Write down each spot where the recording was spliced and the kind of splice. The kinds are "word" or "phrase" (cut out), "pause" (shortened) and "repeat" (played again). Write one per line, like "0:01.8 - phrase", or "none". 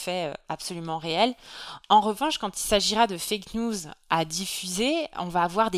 none